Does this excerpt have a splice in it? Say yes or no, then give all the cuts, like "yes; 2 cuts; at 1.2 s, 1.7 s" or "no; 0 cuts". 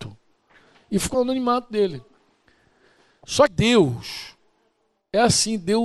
yes; 2 cuts; at 1.1 s, 3.5 s